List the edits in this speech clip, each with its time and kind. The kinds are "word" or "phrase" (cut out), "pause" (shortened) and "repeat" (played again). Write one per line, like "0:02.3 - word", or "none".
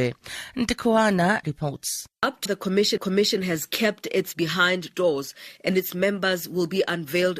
0:01.4 - word
0:02.5 - word
0:03.0 - repeat
0:04.3 - word
0:04.9 - word